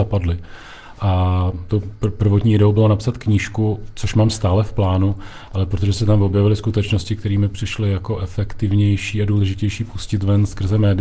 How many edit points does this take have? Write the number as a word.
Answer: zero